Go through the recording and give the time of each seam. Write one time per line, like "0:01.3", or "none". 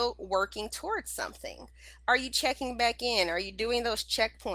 none